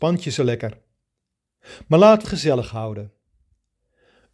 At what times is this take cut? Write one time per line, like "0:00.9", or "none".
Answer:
0:02.2